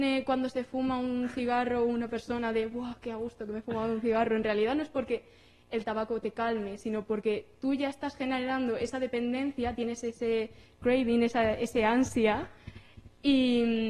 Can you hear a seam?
no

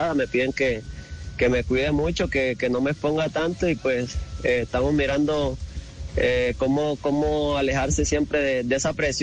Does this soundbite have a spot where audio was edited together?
no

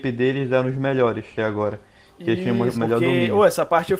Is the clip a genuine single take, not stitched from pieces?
no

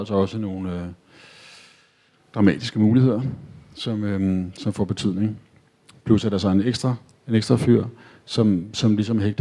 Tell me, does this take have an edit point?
no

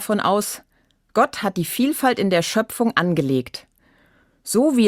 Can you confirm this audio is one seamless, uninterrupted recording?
yes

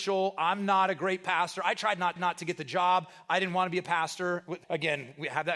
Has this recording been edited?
yes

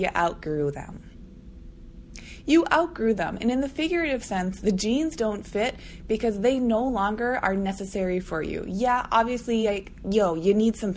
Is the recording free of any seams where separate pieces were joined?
yes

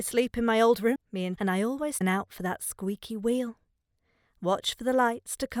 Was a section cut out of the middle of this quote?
yes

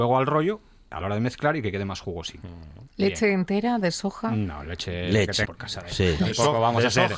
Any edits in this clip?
yes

